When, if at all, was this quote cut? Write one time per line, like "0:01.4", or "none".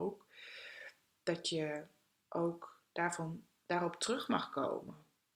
none